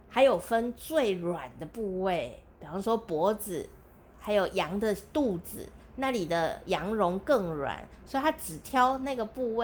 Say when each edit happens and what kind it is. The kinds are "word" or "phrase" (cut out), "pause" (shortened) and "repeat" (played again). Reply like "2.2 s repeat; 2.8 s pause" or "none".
none